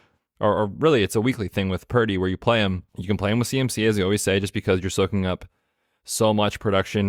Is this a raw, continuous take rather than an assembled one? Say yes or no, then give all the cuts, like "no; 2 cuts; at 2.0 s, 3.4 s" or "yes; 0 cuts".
no; 1 cut; at 2.9 s